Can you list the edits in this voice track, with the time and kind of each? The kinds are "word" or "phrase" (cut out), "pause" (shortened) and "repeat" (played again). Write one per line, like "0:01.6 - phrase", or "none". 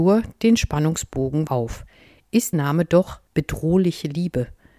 0:01.5 - word
0:02.5 - word
0:03.3 - pause